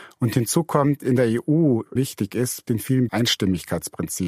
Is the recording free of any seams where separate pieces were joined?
no; 3 cuts; at 2.0 s, 2.7 s, 3.1 s

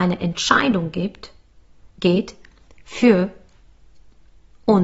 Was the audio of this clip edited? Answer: no; 0 cuts

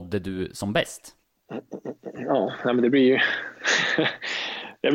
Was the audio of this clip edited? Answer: no; 0 cuts

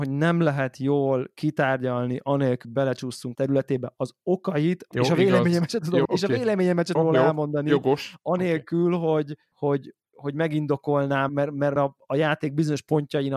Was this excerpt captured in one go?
no; 9 cuts; at 2.6 s, 3.3 s, 4.9 s, 6.0 s, 7.0 s, 9.5 s, 10.1 s, 11.3 s, 11.8 s

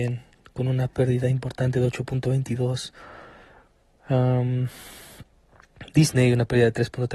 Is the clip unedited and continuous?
yes; 0 cuts

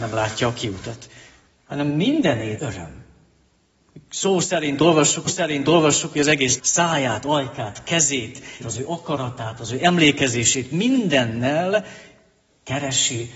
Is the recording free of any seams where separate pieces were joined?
no; 4 cuts; at 2.6 s, 5.3 s, 6.6 s, 8.6 s

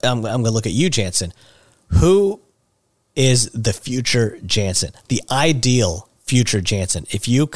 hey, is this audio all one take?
yes; 0 cuts

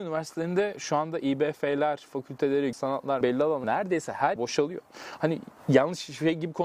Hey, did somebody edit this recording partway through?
yes; 6 cuts; at 2.1 s, 2.7 s, 3.2 s, 3.6 s, 4.4 s, 5.6 s

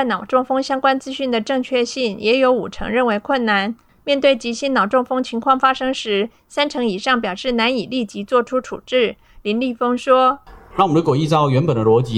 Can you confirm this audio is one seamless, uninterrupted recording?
yes; 0 cuts

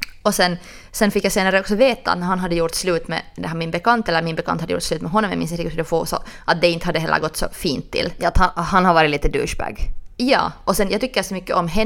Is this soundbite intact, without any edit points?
yes; 0 cuts

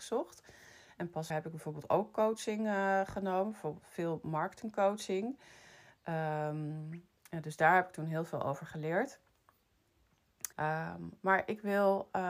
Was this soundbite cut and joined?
yes; 2 cuts; at 1.3 s, 10.5 s

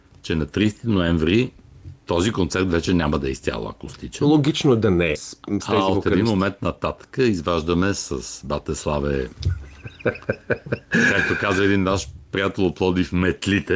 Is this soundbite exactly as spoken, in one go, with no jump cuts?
no; 2 cuts; at 2.0 s, 5.2 s

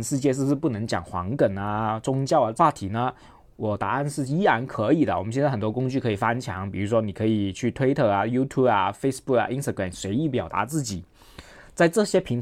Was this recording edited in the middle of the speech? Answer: no; 0 cuts

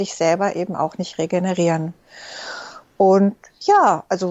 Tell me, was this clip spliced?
no; 0 cuts

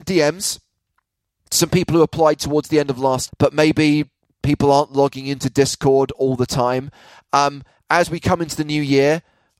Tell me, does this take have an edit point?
yes; 1 cut; at 3.3 s

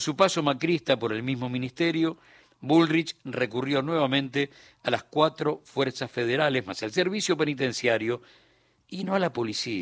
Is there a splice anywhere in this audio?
no; 0 cuts

